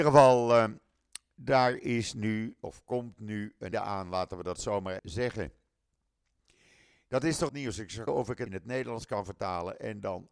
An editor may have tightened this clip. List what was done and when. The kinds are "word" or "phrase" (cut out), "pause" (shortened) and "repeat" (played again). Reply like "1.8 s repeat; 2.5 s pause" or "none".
3.7 s word; 5.0 s word; 7.5 s word; 8.1 s word; 8.5 s word